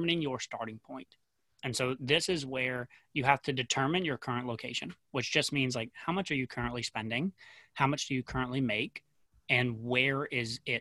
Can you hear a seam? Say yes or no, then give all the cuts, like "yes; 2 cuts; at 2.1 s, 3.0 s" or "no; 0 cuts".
no; 0 cuts